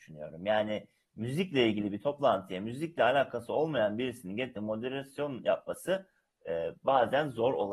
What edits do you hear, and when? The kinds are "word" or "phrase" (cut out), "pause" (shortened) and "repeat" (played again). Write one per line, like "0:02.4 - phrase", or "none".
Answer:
none